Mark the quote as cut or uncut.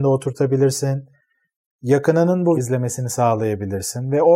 cut